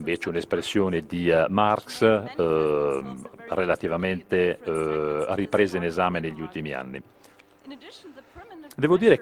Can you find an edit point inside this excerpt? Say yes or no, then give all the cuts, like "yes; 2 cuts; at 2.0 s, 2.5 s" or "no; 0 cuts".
no; 0 cuts